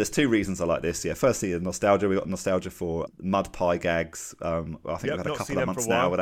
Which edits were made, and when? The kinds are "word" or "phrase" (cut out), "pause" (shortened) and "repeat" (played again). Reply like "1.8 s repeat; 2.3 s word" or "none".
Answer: 3.1 s word